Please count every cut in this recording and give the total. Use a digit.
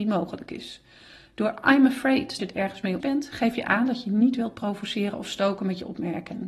2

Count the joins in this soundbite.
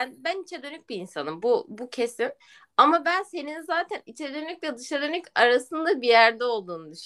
0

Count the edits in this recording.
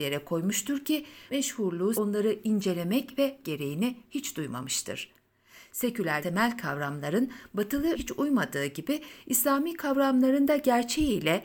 5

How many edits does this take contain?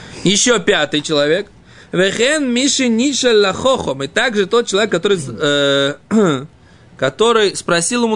0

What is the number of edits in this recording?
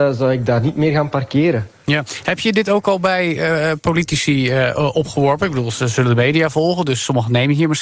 0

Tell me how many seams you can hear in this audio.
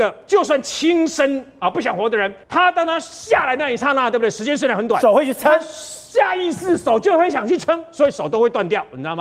1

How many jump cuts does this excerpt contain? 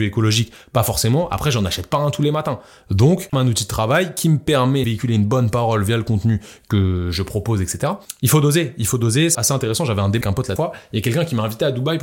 5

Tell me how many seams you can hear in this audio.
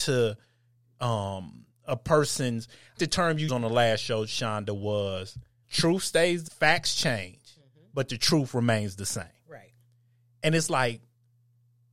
4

